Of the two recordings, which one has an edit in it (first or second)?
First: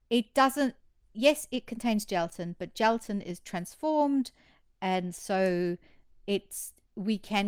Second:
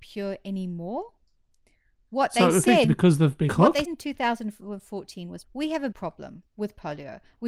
second